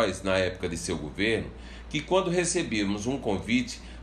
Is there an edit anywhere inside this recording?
no; 0 cuts

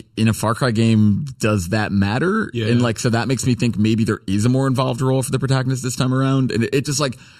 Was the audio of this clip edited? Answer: no; 0 cuts

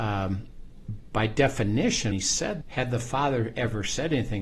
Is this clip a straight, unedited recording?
no; 2 cuts; at 2.1 s, 2.6 s

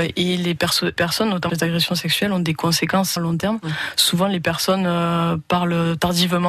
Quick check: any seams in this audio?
yes; 3 cuts; at 1.0 s, 1.5 s, 3.2 s

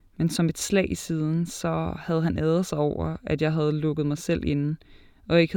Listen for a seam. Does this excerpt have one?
no; 0 cuts

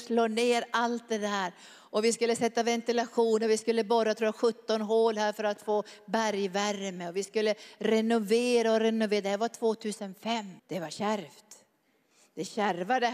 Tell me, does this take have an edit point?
yes; 1 cut; at 10.6 s

